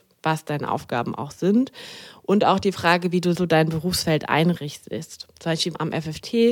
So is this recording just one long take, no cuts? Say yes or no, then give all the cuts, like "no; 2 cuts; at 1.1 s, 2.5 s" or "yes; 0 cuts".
no; 1 cut; at 3.4 s